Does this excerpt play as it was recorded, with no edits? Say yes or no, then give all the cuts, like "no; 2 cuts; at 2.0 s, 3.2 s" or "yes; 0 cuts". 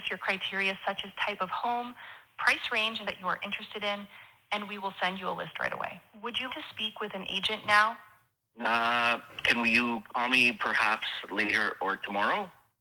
no; 2 cuts; at 3.0 s, 6.5 s